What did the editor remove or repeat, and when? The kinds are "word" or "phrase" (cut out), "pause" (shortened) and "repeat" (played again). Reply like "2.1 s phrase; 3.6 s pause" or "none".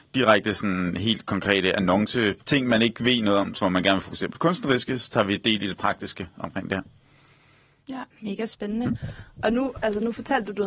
2.4 s phrase; 3.6 s word; 8.1 s pause

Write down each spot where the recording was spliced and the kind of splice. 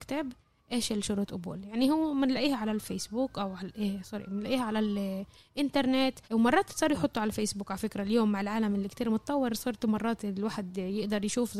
6.2 s pause

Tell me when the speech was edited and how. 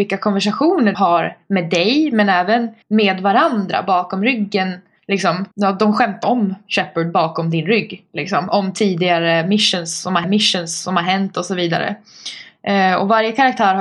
0.9 s word; 2.8 s pause; 5.5 s pause; 6.2 s word; 10.2 s repeat

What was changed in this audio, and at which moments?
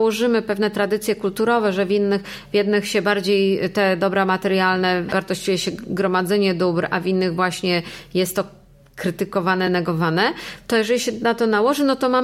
none

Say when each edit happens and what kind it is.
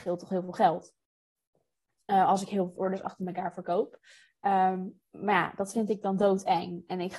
2.8 s word

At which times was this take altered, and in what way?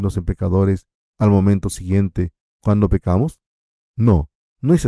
none

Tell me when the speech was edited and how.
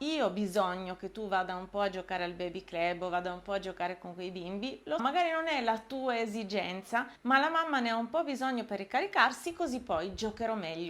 5.0 s word; 7.2 s pause

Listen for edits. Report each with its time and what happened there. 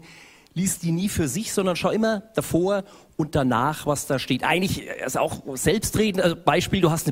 none

